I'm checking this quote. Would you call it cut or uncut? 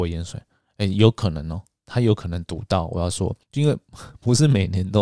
cut